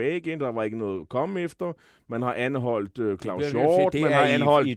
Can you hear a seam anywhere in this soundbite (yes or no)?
no